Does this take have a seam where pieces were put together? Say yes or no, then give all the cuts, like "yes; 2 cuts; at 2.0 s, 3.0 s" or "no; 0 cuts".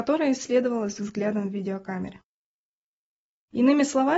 no; 0 cuts